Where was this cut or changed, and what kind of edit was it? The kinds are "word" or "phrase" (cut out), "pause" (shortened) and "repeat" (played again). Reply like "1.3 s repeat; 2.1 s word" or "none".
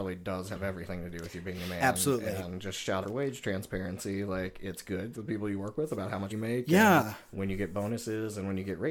3.0 s word; 5.1 s phrase; 6.3 s word